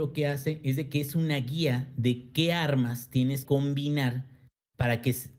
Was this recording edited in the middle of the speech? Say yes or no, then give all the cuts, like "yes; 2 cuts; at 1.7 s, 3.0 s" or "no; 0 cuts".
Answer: yes; 1 cut; at 3.4 s